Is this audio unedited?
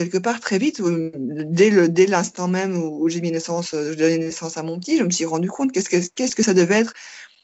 yes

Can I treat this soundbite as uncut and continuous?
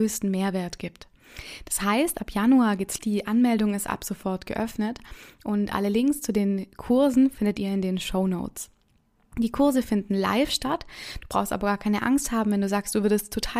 no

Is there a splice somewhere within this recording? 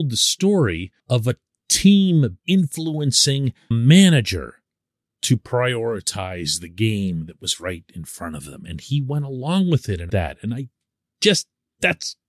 yes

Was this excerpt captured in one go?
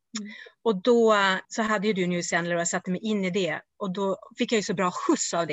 no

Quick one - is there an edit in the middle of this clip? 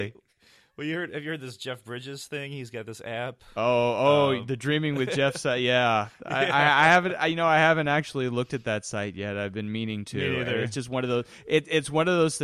no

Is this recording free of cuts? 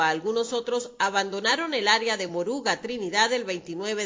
yes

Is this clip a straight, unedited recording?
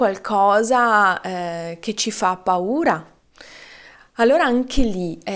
yes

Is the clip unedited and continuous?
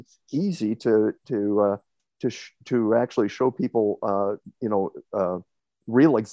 yes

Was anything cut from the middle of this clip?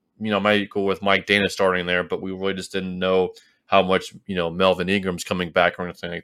no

